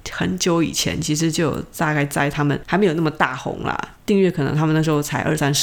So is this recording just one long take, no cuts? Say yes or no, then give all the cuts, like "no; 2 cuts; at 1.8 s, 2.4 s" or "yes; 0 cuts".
no; 1 cut; at 3.9 s